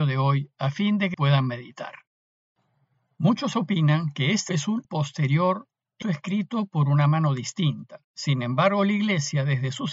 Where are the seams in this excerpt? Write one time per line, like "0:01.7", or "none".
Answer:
0:01.1
0:03.5
0:04.5
0:04.8
0:06.0
0:08.0